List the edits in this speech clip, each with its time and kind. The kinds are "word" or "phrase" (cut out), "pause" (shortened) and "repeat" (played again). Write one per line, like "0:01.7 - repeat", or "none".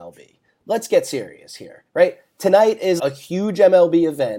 0:01.9 - pause
0:03.0 - word